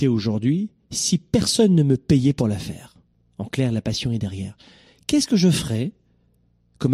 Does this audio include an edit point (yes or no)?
no